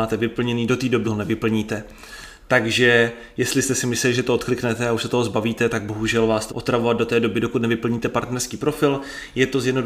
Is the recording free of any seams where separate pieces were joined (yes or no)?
no